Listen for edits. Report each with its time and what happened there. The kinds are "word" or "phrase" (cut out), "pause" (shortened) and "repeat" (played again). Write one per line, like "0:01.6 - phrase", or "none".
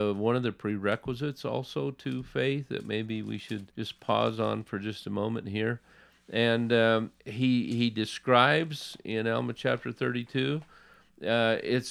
0:03.7 - pause
0:07.2 - pause